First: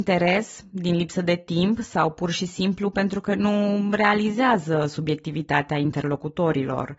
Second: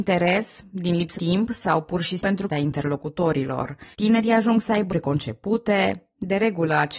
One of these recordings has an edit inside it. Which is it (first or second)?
second